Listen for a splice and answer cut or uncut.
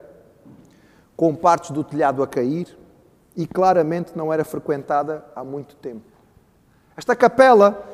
uncut